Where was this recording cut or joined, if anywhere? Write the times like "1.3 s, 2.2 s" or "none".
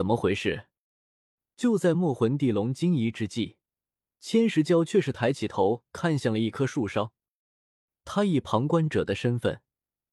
none